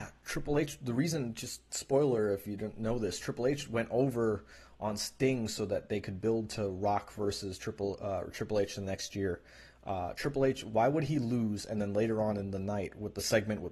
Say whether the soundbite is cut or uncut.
uncut